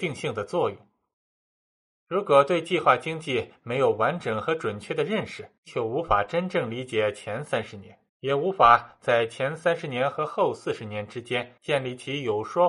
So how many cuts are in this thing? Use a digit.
3